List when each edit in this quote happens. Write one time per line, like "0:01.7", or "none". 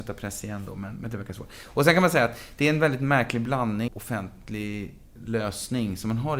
0:03.9